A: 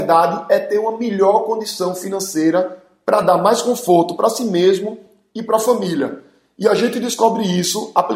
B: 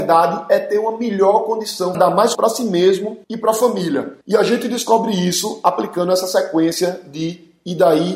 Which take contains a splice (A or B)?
B